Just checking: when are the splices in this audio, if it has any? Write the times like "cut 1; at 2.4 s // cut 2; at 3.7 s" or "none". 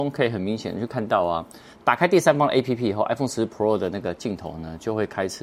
none